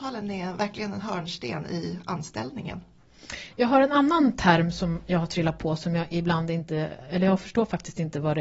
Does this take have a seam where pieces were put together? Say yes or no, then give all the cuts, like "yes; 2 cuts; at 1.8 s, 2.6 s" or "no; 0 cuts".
no; 0 cuts